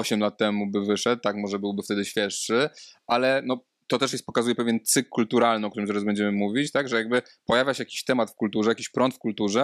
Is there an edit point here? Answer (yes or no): no